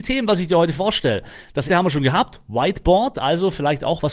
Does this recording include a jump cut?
yes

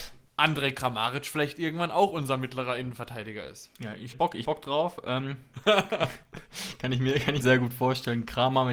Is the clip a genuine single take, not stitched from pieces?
no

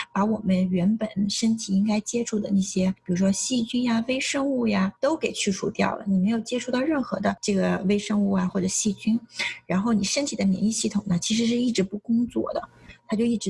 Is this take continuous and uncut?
no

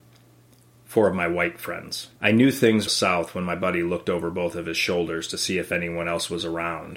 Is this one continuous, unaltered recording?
no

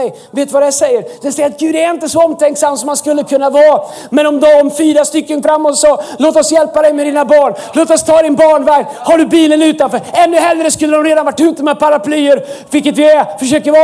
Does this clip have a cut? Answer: yes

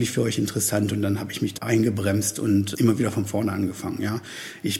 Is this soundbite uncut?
no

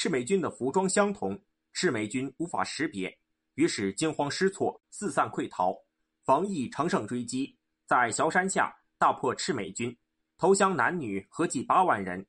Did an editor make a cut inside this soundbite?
no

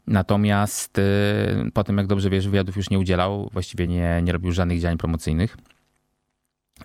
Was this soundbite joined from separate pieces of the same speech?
no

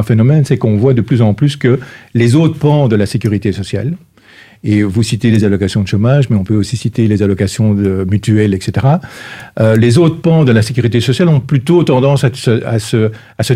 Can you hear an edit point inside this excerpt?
no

